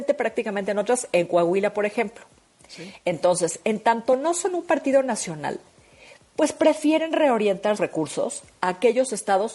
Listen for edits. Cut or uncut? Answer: cut